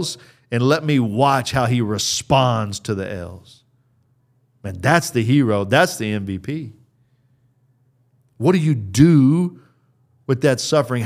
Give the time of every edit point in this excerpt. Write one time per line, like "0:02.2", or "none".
none